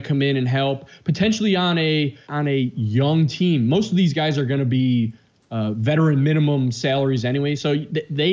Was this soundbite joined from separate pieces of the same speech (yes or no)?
yes